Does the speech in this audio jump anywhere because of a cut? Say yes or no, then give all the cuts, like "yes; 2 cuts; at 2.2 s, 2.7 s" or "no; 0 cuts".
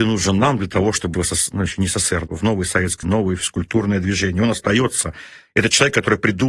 yes; 3 cuts; at 1.1 s, 2.3 s, 3.0 s